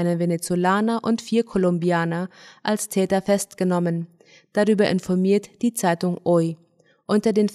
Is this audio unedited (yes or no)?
yes